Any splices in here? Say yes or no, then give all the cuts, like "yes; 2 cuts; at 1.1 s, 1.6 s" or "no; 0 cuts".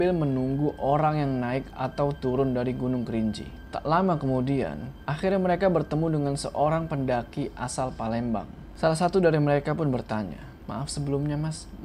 no; 0 cuts